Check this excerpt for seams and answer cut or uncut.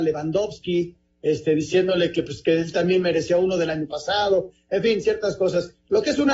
uncut